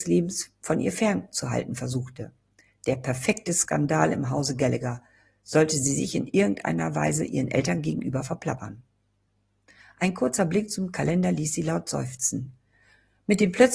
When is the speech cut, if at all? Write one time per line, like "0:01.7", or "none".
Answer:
none

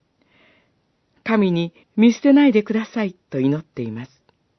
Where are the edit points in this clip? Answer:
0:01.8
0:03.2

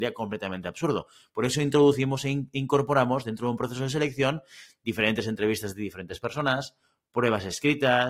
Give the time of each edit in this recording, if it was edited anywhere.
none

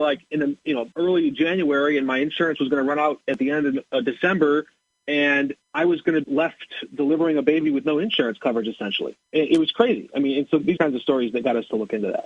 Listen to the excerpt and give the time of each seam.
0:00.9
0:05.6
0:06.2
0:09.2
0:10.8

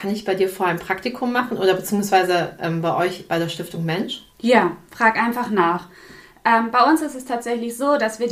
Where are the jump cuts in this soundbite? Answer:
0:04.3

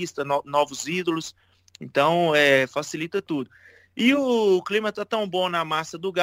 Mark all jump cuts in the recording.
none

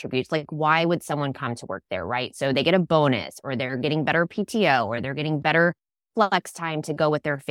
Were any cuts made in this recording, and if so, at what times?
none

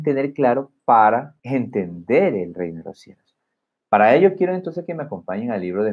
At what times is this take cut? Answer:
none

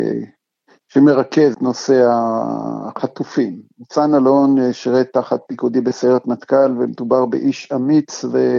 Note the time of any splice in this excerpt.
0:01.5

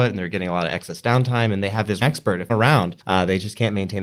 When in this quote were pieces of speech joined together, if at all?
0:02.0
0:02.5
0:03.0

